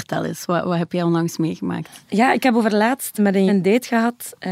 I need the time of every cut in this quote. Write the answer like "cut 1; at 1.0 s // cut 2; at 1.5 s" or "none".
cut 1; at 3.5 s

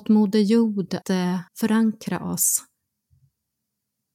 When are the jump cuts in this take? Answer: cut 1; at 1.0 s // cut 2; at 1.5 s

